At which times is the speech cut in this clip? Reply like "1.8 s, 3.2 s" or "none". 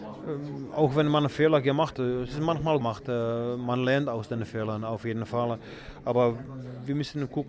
1.9 s, 2.8 s